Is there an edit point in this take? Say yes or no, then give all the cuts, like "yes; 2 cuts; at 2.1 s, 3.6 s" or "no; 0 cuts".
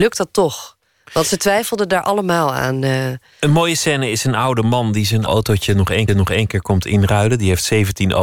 yes; 2 cuts; at 5.3 s, 6.1 s